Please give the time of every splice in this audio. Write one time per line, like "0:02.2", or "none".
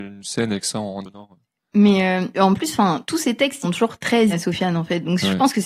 0:01.0
0:02.3
0:03.6
0:04.3